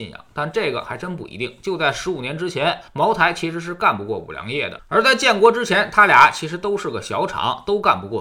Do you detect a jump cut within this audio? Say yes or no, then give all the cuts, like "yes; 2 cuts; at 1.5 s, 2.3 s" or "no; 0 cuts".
yes; 1 cut; at 2.9 s